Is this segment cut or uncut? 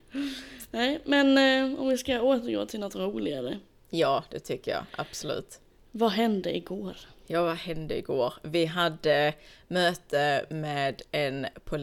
uncut